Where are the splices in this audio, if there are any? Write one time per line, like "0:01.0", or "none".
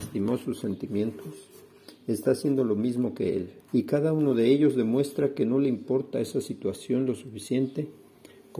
0:03.6